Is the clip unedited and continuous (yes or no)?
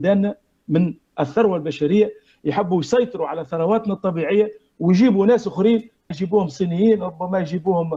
no